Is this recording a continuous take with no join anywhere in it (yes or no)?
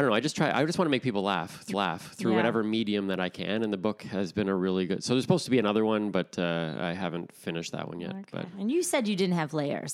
no